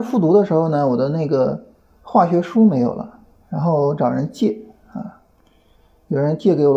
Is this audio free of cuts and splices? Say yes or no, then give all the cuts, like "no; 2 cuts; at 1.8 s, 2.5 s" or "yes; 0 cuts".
yes; 0 cuts